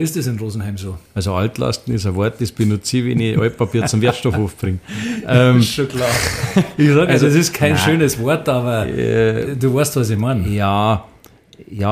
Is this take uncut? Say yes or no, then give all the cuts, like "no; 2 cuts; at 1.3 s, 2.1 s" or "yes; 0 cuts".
yes; 0 cuts